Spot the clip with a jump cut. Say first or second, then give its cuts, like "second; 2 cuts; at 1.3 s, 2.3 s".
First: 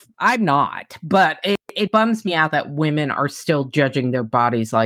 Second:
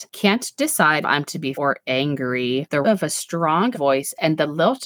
second; 4 cuts; at 1.0 s, 1.5 s, 2.8 s, 3.7 s